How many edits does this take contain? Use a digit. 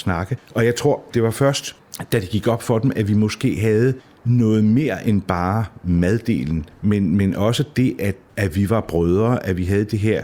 0